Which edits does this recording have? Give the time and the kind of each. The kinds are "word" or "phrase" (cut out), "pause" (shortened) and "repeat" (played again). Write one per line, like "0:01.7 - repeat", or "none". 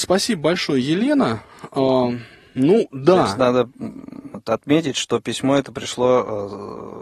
none